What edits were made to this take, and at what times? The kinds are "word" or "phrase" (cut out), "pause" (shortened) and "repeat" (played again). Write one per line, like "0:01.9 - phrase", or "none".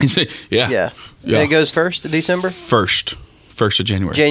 0:01.7 - phrase